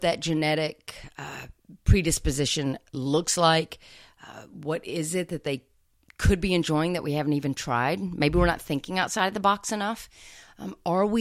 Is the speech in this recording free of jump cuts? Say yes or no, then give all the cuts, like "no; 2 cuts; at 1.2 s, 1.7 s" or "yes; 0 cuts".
yes; 0 cuts